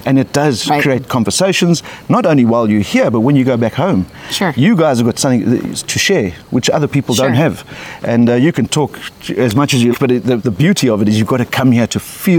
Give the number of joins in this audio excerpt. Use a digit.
2